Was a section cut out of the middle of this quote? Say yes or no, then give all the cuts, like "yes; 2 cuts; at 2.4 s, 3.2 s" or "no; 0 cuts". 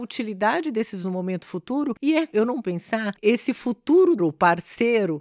yes; 5 cuts; at 1.0 s, 2.3 s, 2.6 s, 3.2 s, 4.2 s